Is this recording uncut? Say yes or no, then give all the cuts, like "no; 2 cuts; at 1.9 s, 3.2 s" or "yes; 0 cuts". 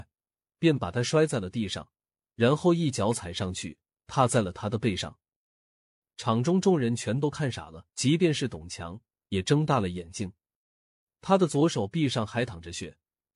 no; 1 cut; at 7.9 s